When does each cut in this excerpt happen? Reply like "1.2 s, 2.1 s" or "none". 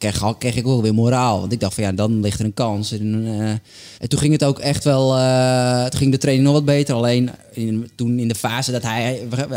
3.9 s, 7.4 s